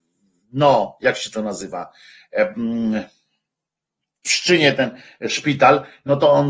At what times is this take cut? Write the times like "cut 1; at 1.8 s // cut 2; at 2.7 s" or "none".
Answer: none

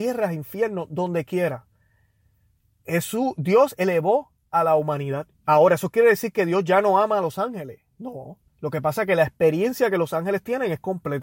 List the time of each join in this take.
cut 1; at 5.3 s // cut 2; at 8.5 s

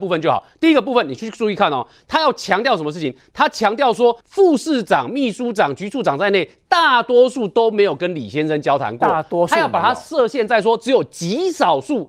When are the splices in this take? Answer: cut 1; at 4.2 s

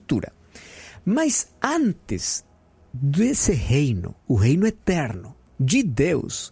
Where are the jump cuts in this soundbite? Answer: cut 1; at 4.2 s

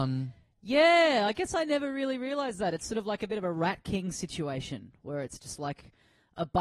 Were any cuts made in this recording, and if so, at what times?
none

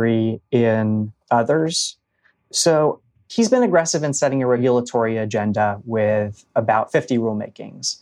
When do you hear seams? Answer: none

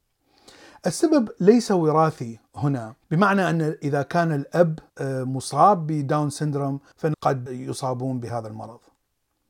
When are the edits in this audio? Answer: cut 1; at 3.0 s // cut 2; at 4.9 s // cut 3; at 7.1 s // cut 4; at 7.5 s

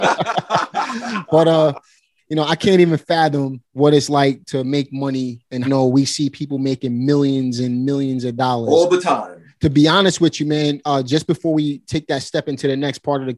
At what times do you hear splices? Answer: cut 1; at 3.6 s // cut 2; at 5.6 s

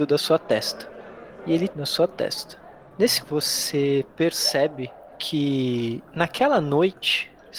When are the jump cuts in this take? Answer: cut 1; at 1.7 s // cut 2; at 3.2 s // cut 3; at 6.1 s

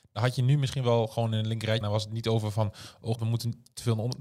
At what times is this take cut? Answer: cut 1; at 1.8 s // cut 2; at 3.1 s

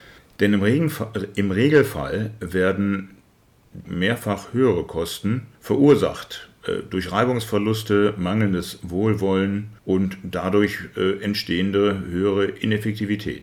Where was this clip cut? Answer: cut 1; at 3.8 s // cut 2; at 5.5 s // cut 3; at 9.8 s

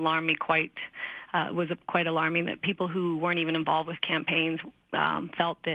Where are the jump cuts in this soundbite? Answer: none

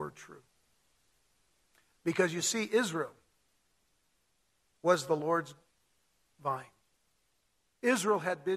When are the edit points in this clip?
none

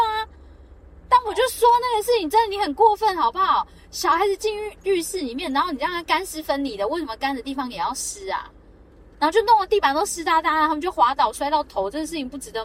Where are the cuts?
none

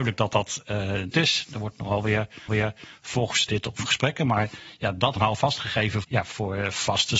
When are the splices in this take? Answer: cut 1; at 1.1 s // cut 2; at 2.5 s // cut 3; at 3.9 s // cut 4; at 5.2 s // cut 5; at 6.0 s

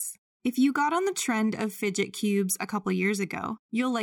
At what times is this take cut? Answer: none

